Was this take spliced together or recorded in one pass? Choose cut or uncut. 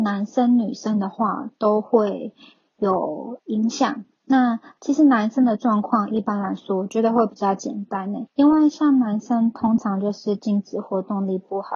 cut